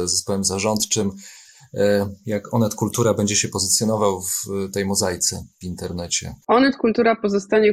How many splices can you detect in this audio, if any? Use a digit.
2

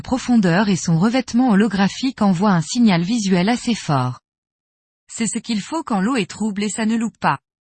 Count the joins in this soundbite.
0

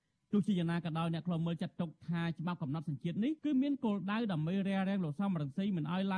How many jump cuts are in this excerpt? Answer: 1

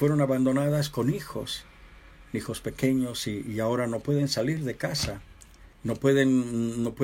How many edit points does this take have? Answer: 1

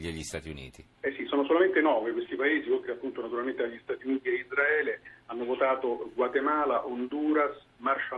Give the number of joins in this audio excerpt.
1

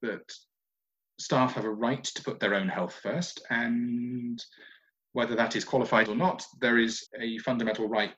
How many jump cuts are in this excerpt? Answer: 2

